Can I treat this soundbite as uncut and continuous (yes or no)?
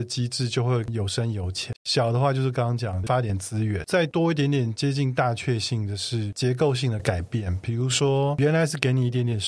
no